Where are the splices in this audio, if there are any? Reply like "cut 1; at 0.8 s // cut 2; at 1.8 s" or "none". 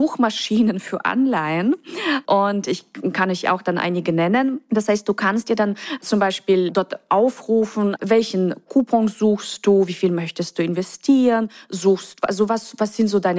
cut 1; at 8.0 s